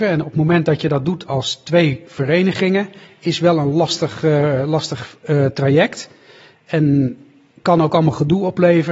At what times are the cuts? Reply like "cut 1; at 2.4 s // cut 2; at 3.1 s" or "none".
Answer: none